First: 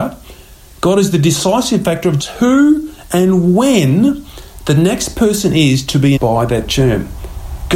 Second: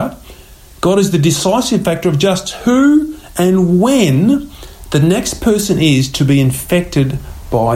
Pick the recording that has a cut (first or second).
first